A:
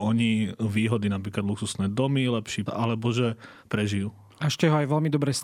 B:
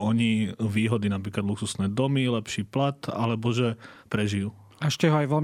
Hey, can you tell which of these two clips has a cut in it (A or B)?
A